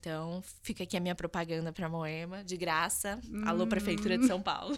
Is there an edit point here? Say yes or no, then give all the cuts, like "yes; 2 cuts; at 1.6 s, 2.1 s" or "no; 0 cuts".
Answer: no; 0 cuts